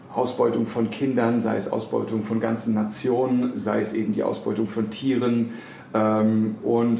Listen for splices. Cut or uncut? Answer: uncut